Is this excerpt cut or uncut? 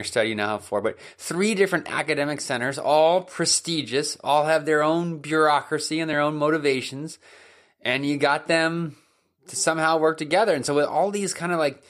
uncut